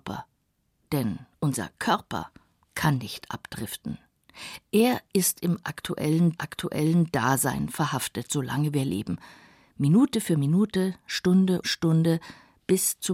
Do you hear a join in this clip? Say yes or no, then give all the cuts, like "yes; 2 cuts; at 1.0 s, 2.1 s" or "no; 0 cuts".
yes; 2 cuts; at 6.4 s, 11.6 s